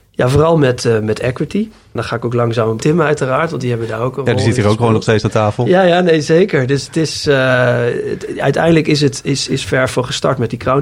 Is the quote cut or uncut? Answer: cut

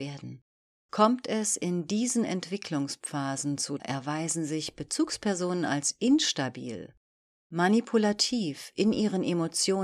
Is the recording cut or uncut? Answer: cut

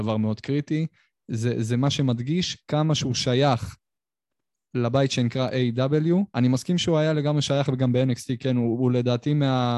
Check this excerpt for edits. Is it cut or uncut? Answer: cut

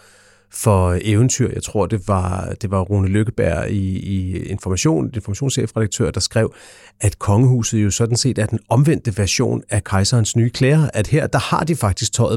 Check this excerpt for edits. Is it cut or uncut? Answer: uncut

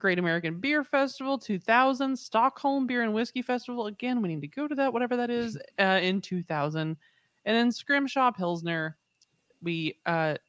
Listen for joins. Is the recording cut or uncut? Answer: uncut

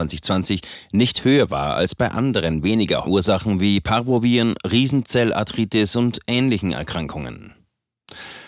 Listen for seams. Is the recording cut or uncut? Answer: cut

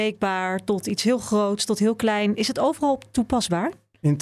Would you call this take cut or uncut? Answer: uncut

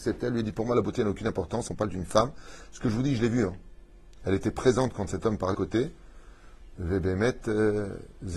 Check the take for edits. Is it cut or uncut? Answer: cut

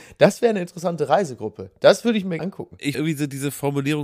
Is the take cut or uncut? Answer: cut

